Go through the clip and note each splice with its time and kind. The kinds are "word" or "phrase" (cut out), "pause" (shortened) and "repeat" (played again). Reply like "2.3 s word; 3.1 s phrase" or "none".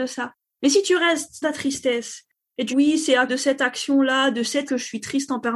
1.4 s word; 2.7 s word; 3.3 s word; 4.7 s word